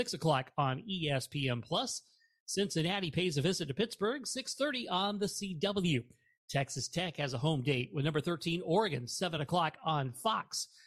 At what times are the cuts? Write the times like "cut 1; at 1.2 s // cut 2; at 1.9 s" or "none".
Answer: none